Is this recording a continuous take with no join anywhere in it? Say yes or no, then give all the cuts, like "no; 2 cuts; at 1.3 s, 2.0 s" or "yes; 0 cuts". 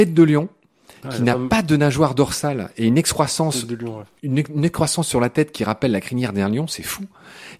yes; 0 cuts